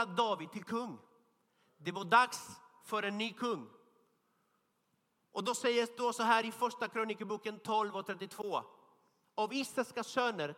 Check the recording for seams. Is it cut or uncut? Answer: uncut